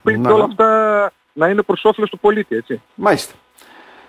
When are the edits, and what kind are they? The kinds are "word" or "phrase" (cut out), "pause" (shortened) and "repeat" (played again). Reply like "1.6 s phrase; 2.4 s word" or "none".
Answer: 2.9 s pause